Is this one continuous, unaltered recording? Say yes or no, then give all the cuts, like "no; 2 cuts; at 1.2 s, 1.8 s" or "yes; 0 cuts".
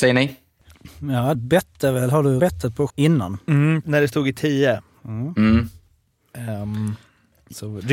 no; 4 cuts; at 1.3 s, 2.4 s, 2.9 s, 3.8 s